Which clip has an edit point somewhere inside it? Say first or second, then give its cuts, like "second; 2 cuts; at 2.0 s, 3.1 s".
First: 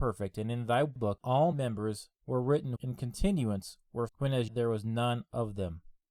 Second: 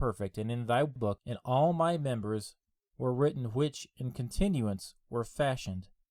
first; 6 cuts; at 1.2 s, 1.5 s, 2.2 s, 2.8 s, 4.1 s, 4.5 s